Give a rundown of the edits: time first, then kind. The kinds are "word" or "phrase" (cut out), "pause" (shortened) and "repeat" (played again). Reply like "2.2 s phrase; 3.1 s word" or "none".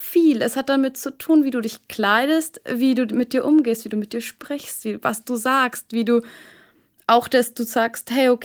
none